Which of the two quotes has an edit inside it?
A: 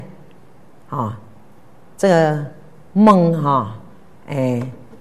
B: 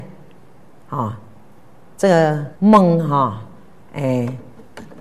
B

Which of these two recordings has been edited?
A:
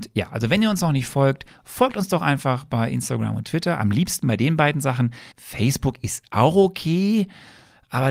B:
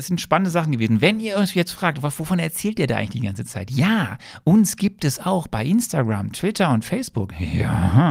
A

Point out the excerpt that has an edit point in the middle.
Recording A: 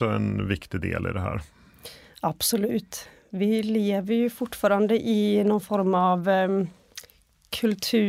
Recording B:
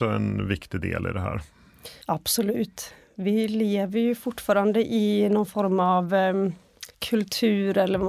B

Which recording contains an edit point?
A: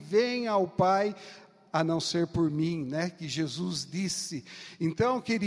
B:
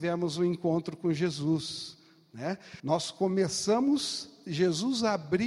B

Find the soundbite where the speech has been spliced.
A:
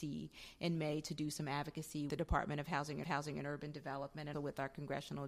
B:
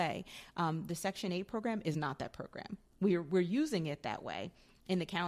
A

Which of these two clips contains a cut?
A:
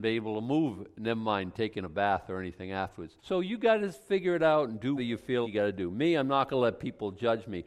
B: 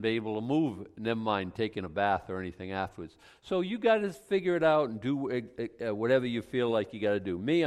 A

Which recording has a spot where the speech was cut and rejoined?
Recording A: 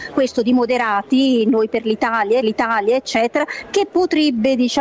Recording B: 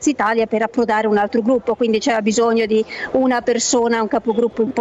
A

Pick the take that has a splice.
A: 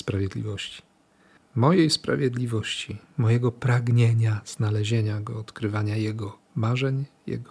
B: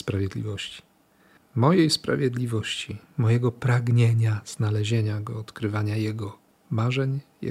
A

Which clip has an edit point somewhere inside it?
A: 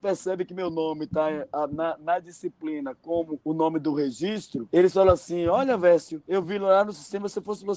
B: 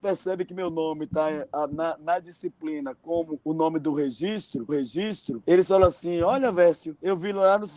B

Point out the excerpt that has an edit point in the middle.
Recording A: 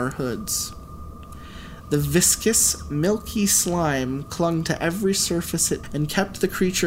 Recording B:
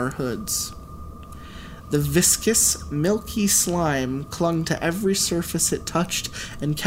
A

